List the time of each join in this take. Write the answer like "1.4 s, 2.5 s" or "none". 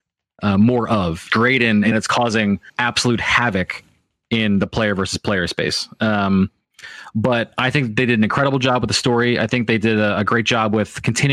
1.3 s, 1.9 s, 2.7 s